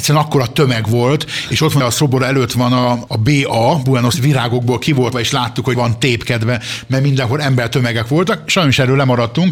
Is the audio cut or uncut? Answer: cut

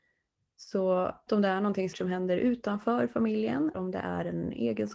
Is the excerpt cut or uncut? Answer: cut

